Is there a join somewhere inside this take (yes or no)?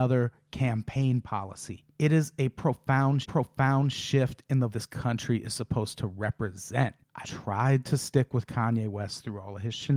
yes